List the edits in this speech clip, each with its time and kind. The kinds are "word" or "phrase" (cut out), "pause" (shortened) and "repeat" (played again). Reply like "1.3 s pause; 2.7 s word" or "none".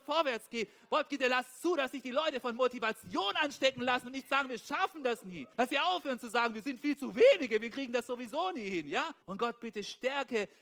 5.5 s pause; 9.2 s pause